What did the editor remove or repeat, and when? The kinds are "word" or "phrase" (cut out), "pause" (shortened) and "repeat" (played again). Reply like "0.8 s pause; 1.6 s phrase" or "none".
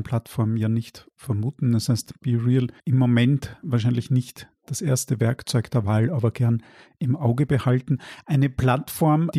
2.8 s pause; 3.6 s word